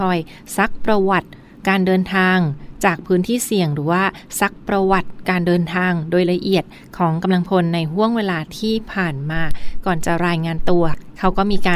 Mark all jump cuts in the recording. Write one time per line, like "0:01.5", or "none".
none

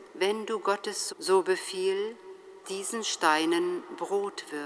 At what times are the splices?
0:01.1
0:02.6

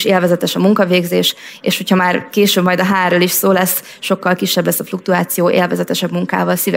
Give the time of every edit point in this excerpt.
none

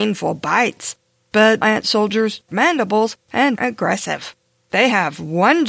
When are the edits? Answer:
0:01.6
0:02.5
0:03.6

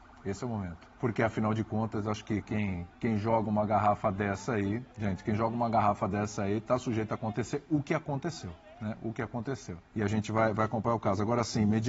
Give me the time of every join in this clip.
0:00.9
0:02.9
0:04.9
0:09.9

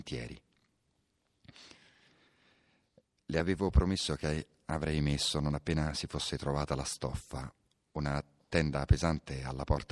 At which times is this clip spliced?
none

